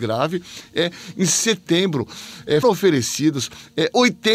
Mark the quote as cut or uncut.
cut